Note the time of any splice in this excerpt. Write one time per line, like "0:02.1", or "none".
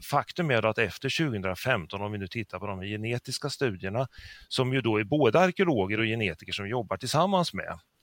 none